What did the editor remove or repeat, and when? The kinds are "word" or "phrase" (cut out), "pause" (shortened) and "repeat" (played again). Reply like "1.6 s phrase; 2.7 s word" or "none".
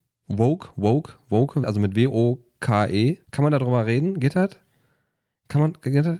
1.6 s word; 3.2 s pause